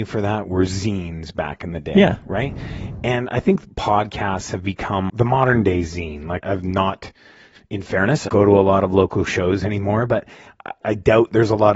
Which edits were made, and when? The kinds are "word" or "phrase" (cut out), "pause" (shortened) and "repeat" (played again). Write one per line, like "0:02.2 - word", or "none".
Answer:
0:05.1 - word
0:06.4 - word
0:08.3 - word
0:10.8 - word